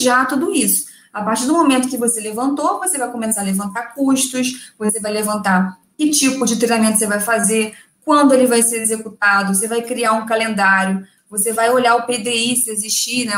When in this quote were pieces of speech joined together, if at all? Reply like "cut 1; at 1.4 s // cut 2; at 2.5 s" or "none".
none